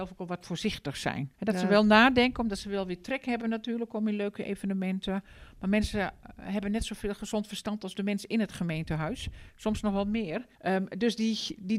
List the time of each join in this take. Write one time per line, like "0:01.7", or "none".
0:01.3
0:10.5